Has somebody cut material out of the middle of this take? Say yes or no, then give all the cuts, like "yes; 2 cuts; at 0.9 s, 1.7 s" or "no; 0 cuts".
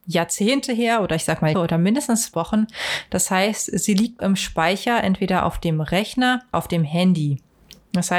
yes; 4 cuts; at 1.5 s, 2.3 s, 4.2 s, 6.5 s